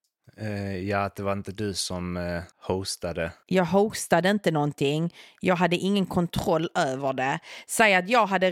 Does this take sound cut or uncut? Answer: cut